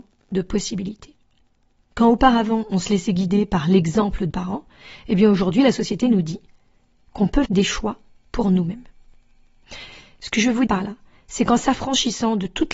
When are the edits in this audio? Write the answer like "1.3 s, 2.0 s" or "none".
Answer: 4.3 s, 7.4 s, 10.7 s